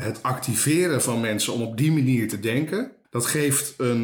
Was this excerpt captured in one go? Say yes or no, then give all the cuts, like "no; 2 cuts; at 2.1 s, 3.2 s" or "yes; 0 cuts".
no; 1 cut; at 3.0 s